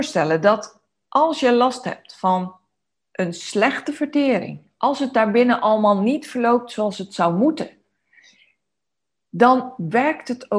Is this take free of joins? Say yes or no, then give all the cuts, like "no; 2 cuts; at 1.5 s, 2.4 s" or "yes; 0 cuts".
yes; 0 cuts